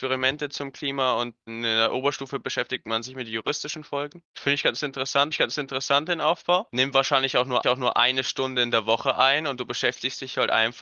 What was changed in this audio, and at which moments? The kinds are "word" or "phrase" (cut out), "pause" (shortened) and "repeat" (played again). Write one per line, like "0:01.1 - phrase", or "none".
0:01.5 - word
0:05.3 - repeat
0:07.6 - repeat